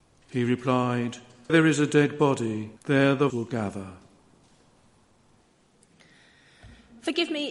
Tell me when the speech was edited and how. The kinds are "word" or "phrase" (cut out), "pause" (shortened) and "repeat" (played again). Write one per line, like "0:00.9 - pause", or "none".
0:01.5 - word
0:02.8 - pause
0:03.3 - word